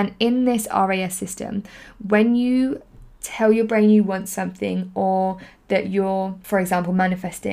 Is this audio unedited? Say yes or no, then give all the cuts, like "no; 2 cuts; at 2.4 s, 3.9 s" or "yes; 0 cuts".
yes; 0 cuts